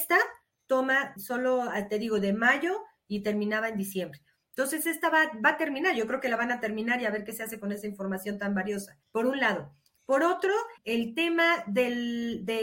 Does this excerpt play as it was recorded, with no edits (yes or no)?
no